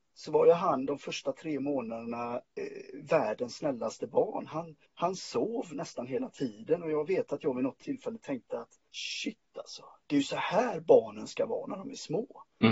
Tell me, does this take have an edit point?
yes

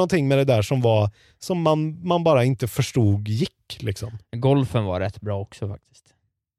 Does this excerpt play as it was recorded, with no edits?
yes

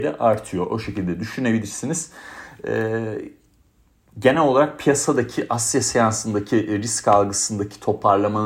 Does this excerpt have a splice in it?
no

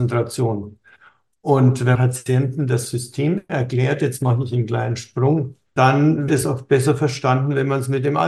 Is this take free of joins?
no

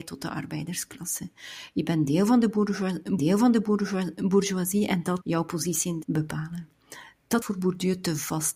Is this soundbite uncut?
no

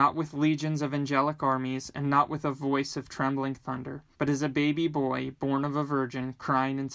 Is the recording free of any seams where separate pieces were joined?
no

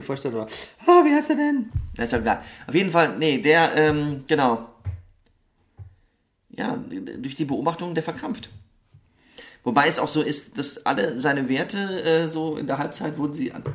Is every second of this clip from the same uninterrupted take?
yes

